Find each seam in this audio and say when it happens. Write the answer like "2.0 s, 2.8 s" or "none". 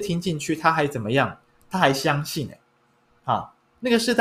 none